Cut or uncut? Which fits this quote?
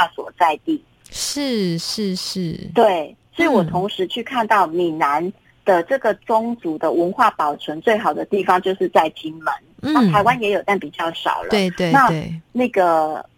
uncut